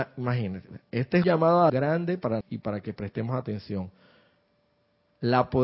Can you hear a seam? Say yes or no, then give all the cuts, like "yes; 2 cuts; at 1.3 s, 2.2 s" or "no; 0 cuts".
yes; 3 cuts; at 1.2 s, 1.7 s, 2.4 s